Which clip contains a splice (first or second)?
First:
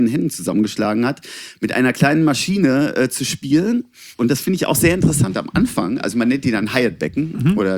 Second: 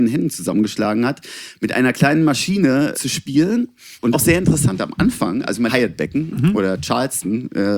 second